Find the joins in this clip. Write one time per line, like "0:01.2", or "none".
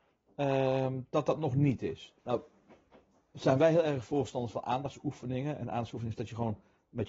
0:02.2